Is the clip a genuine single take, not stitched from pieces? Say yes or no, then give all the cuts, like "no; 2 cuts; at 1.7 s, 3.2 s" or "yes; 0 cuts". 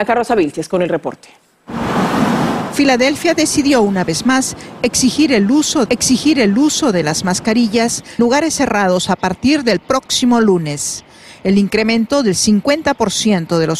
no; 2 cuts; at 5.9 s, 8.2 s